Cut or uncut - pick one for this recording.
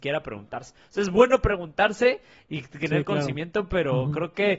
uncut